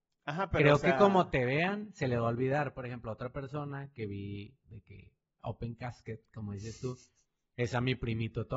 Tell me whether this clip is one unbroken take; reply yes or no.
no